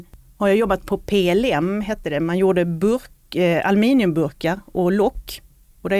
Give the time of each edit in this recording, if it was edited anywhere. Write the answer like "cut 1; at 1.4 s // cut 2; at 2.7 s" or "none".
none